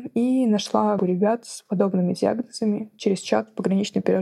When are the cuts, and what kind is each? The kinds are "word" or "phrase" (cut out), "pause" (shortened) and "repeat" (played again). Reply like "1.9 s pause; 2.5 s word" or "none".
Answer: 1.0 s word